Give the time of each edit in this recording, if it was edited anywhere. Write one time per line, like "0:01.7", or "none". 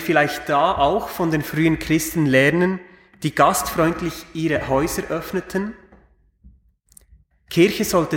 none